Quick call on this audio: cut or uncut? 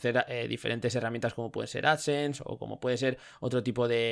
uncut